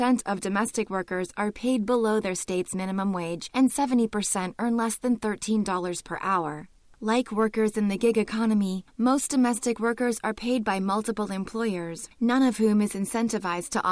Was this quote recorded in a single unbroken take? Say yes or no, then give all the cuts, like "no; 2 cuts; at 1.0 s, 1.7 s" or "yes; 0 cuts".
yes; 0 cuts